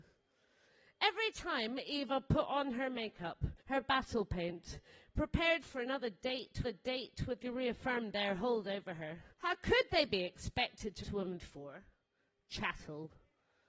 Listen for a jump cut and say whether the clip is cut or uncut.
cut